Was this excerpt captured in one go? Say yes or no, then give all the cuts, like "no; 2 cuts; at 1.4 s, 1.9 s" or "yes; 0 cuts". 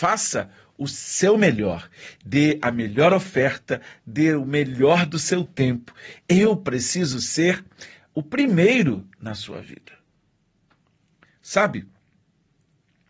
yes; 0 cuts